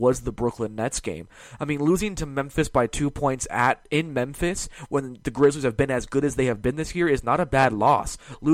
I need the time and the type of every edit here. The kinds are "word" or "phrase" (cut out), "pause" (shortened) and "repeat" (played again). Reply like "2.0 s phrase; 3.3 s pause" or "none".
none